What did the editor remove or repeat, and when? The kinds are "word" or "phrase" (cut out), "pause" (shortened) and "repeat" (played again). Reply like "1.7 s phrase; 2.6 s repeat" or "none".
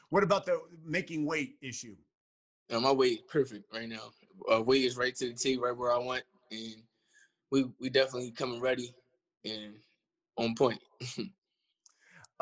none